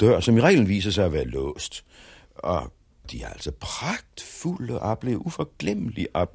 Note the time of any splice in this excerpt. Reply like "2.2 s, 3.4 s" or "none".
3.0 s